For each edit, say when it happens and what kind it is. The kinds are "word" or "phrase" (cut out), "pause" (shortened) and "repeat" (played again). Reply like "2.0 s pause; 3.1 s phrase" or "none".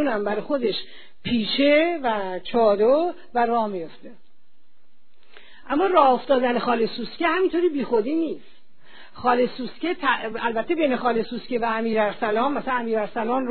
none